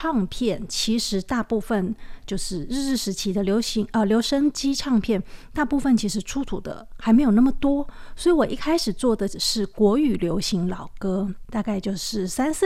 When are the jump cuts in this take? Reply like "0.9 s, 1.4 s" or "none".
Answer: 11.4 s